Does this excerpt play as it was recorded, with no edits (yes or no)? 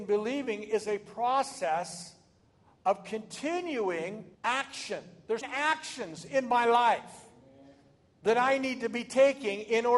no